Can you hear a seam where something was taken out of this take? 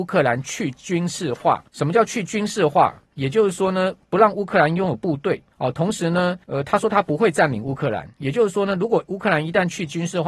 yes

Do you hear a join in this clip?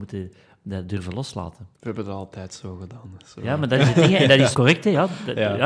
yes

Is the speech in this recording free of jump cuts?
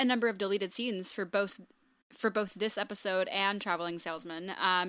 yes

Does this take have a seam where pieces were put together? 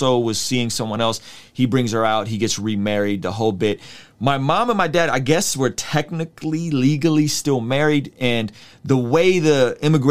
no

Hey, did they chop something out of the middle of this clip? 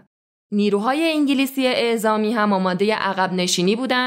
no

